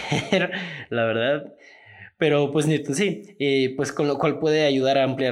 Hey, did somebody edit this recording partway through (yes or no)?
no